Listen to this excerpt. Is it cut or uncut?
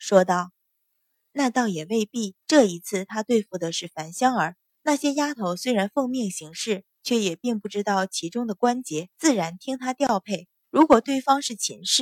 cut